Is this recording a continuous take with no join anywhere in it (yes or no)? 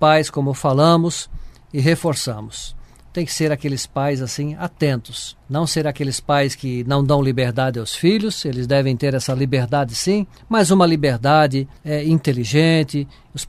no